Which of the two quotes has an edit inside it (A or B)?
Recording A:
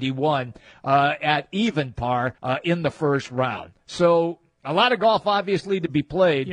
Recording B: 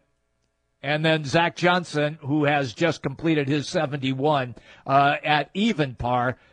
A